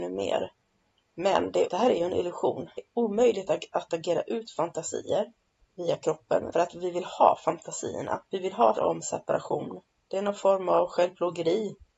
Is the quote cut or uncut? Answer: cut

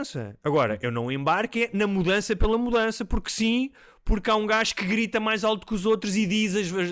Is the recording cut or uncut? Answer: uncut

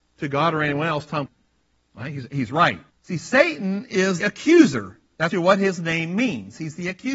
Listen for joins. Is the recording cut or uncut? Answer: cut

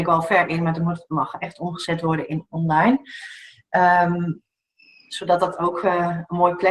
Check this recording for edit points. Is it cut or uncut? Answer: uncut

